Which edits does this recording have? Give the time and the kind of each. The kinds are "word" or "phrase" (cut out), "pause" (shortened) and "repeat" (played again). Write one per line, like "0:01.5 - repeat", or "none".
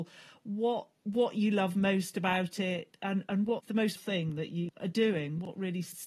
0:04.0 - word